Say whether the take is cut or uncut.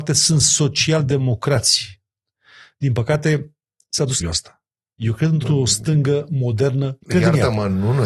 cut